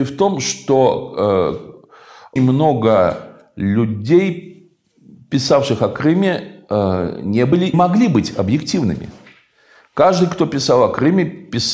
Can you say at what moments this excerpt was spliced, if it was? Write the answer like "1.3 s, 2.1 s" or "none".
2.4 s, 7.7 s